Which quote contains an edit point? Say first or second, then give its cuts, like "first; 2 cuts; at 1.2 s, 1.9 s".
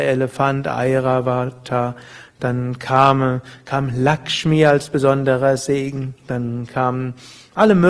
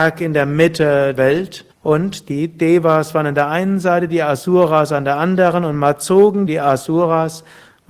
second; 3 cuts; at 1.1 s, 1.7 s, 6.5 s